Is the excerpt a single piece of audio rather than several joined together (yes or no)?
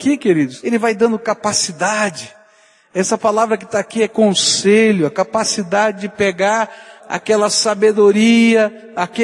yes